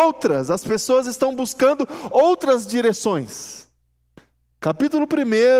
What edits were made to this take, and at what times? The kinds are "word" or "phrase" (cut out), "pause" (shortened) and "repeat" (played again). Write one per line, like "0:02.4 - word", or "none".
none